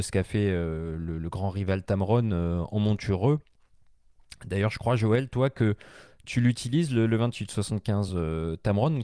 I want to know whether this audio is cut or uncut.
uncut